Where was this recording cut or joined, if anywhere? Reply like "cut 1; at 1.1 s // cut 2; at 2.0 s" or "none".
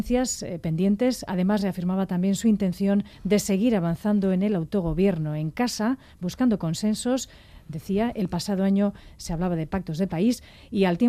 cut 1; at 3.1 s